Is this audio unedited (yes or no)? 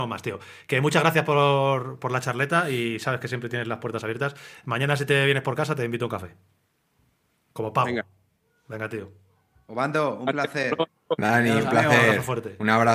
yes